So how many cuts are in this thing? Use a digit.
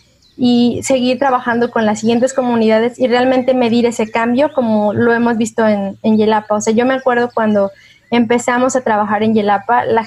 0